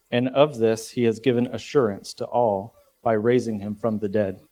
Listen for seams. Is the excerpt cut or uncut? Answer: uncut